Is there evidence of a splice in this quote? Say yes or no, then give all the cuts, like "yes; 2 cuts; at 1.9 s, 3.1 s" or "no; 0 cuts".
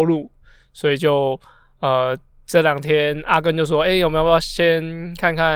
yes; 1 cut; at 2.3 s